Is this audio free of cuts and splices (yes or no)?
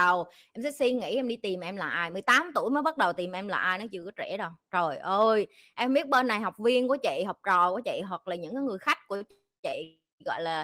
yes